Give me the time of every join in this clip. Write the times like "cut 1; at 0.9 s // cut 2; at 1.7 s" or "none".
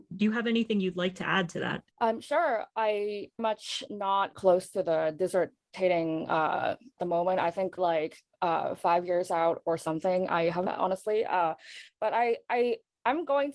cut 1; at 1.9 s // cut 2; at 3.4 s // cut 3; at 4.3 s // cut 4; at 7.0 s // cut 5; at 7.8 s // cut 6; at 10.7 s